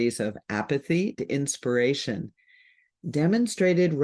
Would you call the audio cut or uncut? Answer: cut